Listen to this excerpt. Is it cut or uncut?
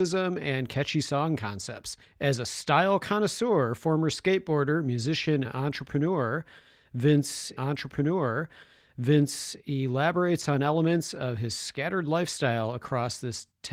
cut